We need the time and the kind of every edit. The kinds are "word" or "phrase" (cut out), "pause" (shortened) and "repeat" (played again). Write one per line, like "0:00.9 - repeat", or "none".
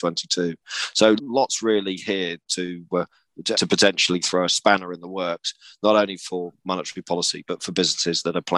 0:01.2 - word
0:02.4 - word
0:03.5 - word